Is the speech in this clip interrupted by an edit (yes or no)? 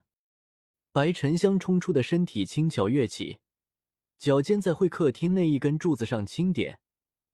no